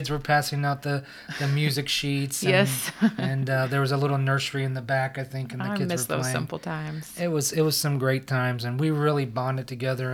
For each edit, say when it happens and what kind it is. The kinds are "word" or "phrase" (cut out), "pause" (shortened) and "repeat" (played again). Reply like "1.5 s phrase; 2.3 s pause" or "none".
none